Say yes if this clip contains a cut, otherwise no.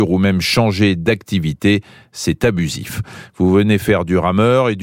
no